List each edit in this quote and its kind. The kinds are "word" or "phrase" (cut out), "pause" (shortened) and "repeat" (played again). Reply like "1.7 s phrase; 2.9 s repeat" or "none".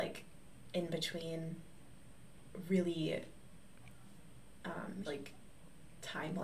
5.0 s word